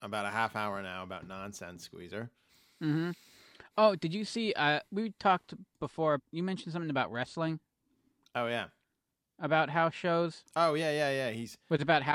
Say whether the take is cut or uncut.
cut